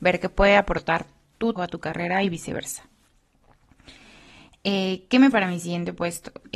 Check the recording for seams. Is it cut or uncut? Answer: cut